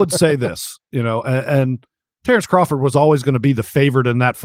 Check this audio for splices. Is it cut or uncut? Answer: uncut